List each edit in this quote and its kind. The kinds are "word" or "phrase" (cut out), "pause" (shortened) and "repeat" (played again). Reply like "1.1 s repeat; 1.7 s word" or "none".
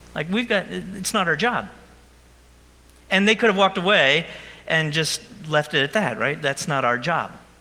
none